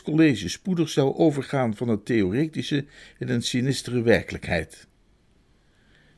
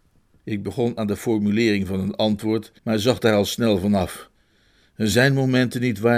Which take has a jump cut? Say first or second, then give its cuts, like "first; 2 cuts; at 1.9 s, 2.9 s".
second; 1 cut; at 2.8 s